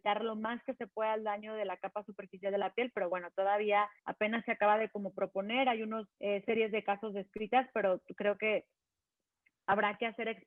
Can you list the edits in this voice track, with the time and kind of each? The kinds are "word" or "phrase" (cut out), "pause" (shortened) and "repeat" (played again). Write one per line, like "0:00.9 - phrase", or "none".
0:04.0 - pause
0:06.1 - pause

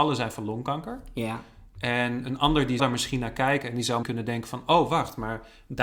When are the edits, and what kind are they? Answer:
0:02.8 - word
0:04.0 - word

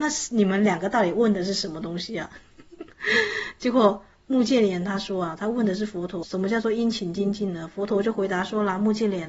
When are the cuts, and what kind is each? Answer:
0:06.2 - word

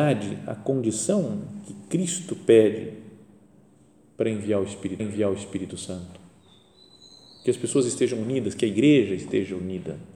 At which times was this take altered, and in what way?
0:05.0 - repeat

